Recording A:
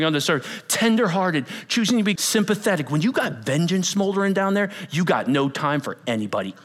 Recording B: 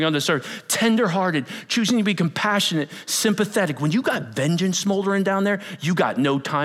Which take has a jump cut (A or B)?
A